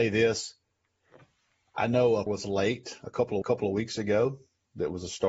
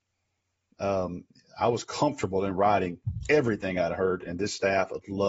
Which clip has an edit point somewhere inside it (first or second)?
first